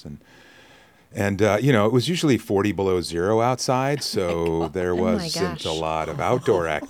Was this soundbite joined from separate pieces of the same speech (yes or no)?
no